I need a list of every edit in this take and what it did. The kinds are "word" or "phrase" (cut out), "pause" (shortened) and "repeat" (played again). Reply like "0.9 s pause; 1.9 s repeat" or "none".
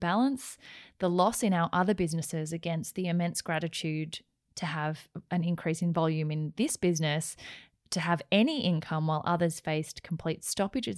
none